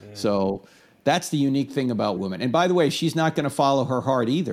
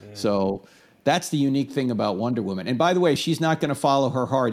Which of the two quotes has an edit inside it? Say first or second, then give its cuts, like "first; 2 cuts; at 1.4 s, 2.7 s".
first; 1 cut; at 2.2 s